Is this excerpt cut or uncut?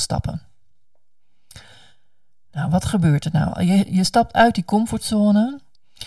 uncut